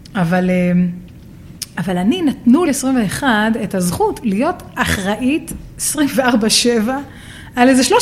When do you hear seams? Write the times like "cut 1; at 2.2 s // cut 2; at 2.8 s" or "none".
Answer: cut 1; at 1.7 s // cut 2; at 2.6 s // cut 3; at 4.2 s

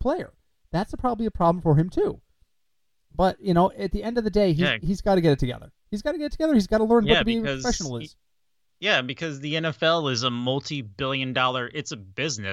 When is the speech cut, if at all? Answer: none

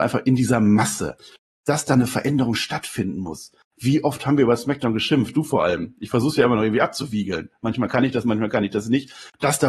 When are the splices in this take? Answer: none

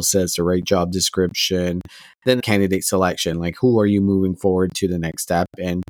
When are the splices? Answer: none

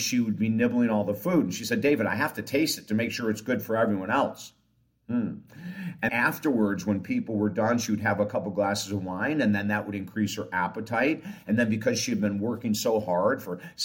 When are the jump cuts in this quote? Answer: cut 1; at 6.1 s

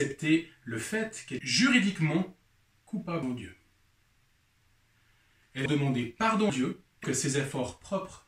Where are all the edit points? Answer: cut 1; at 1.4 s // cut 2; at 3.2 s // cut 3; at 5.7 s // cut 4; at 6.5 s // cut 5; at 7.0 s

